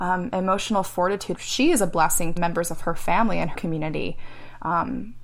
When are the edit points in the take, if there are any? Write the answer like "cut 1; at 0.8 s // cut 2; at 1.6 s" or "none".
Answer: cut 1; at 1.3 s // cut 2; at 2.4 s // cut 3; at 3.5 s